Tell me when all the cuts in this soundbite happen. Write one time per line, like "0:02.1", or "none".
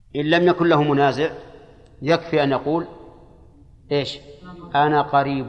none